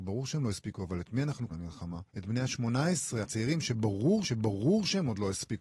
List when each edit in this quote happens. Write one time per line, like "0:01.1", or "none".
0:01.5
0:02.1
0:03.2
0:04.2